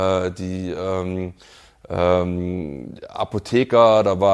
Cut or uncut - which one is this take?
uncut